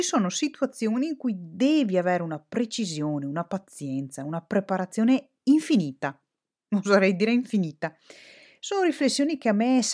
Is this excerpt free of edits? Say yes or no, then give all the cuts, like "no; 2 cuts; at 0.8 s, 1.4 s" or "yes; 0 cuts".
yes; 0 cuts